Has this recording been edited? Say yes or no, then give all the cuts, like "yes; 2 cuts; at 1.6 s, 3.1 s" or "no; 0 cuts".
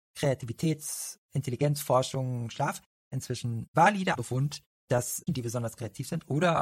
yes; 3 cuts; at 3.1 s, 4.1 s, 5.3 s